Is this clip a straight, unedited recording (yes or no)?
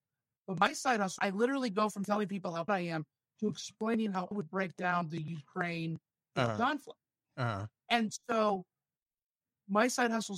no